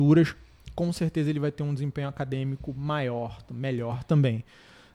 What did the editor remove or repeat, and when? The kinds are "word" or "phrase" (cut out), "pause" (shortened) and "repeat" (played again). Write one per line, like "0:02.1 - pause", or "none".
none